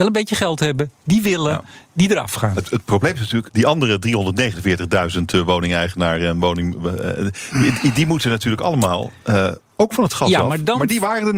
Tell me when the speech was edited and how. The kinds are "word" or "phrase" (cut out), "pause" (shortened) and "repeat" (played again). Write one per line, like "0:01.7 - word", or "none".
0:02.7 - word
0:03.5 - word